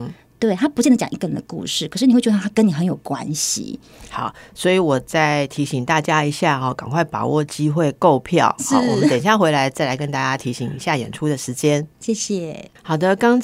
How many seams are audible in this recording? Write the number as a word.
zero